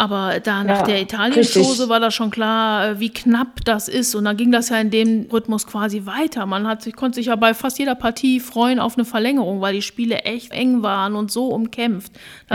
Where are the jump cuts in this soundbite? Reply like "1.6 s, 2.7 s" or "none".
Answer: 10.5 s